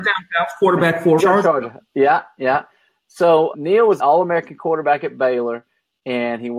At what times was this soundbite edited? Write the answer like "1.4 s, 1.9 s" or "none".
1.2 s, 3.5 s, 4.0 s

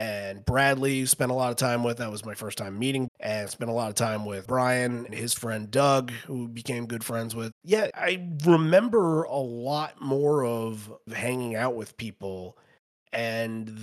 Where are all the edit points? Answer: 3.1 s, 5.1 s, 7.5 s

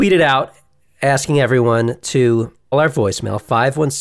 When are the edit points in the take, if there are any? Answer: 2.7 s

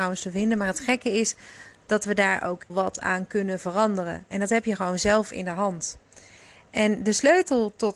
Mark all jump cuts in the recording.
2.7 s

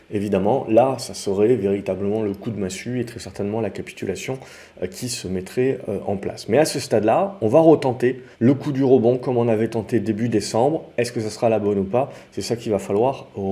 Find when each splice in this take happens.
8.3 s

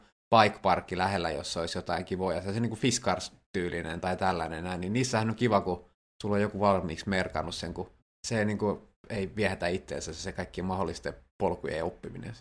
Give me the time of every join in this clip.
none

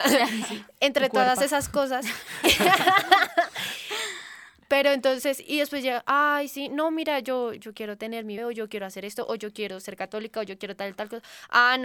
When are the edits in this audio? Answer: 7.6 s, 8.4 s

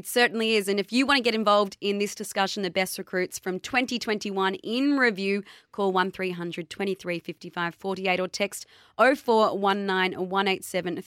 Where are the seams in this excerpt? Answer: none

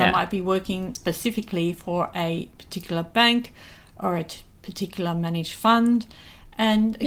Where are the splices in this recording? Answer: none

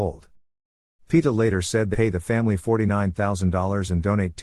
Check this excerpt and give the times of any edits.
1.9 s

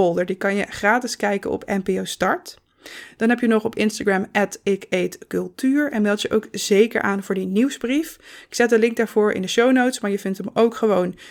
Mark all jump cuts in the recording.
none

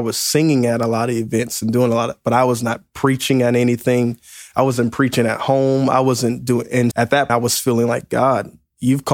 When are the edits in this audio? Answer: 6.9 s, 7.3 s

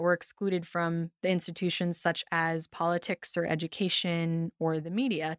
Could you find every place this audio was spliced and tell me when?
none

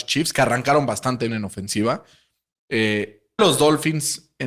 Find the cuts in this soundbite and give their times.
1.3 s, 3.4 s

